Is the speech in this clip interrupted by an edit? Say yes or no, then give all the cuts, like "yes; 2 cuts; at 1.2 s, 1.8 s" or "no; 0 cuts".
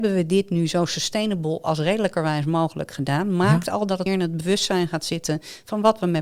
yes; 1 cut; at 4.1 s